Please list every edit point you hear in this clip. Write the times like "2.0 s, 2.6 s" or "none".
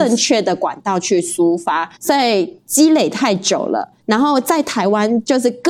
2.0 s